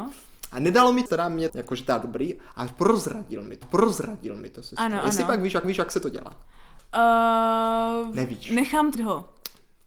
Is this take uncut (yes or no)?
no